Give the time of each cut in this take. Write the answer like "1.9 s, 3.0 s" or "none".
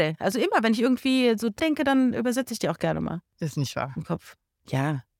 1.6 s

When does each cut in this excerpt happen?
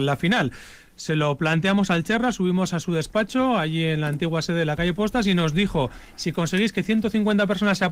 none

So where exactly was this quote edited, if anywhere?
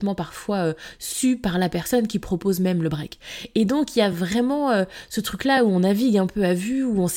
none

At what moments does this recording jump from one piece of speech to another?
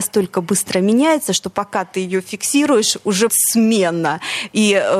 3.3 s

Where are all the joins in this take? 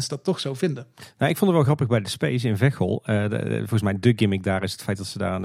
none

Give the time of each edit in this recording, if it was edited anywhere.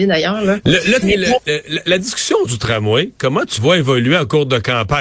1.0 s, 2.4 s, 3.6 s

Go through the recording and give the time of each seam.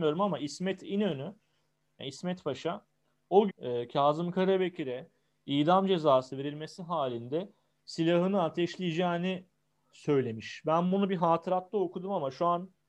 3.5 s

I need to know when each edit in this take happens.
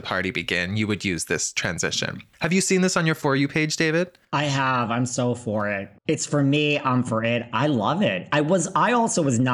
2.3 s, 4.2 s, 6.0 s

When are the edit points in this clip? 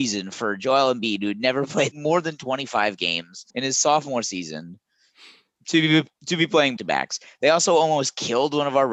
1.9 s, 3.5 s, 6.8 s

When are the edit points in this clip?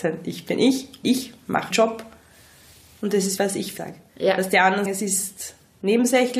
1.0 s, 1.7 s, 3.4 s, 3.8 s, 4.9 s

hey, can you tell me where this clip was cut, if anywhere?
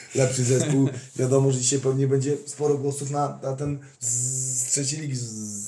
3.9 s

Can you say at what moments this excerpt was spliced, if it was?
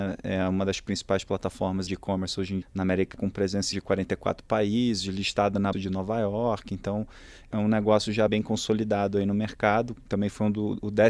1.9 s, 2.6 s, 3.1 s, 3.7 s, 5.7 s, 7.5 s, 8.3 s

